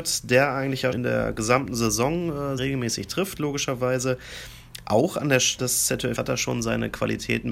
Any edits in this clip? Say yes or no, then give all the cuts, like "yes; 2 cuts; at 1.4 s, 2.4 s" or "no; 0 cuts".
yes; 4 cuts; at 0.9 s, 2.6 s, 5.6 s, 6.2 s